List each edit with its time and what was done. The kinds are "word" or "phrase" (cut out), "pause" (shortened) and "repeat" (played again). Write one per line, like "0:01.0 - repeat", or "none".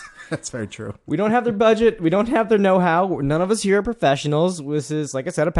none